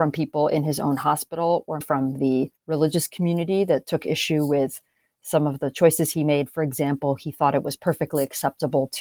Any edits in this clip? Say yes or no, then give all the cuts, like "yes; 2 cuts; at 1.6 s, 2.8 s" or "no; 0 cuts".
yes; 2 cuts; at 1.8 s, 2.6 s